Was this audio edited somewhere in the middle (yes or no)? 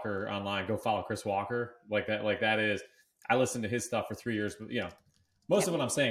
no